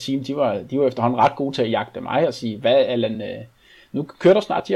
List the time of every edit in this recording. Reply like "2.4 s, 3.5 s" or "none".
none